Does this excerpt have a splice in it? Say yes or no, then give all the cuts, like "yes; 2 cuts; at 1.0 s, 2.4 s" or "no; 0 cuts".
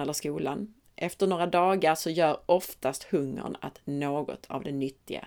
no; 0 cuts